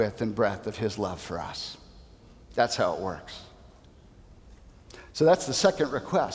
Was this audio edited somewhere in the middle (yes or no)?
no